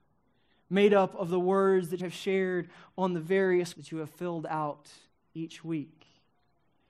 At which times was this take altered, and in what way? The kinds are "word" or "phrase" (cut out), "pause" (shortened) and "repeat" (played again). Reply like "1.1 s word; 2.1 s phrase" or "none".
2.0 s word; 3.7 s word